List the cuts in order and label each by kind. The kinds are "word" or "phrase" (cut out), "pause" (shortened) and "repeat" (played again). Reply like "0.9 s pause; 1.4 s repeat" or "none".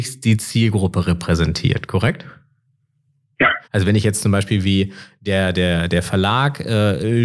3.6 s pause